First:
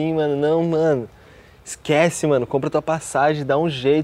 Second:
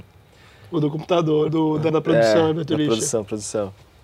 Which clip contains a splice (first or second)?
second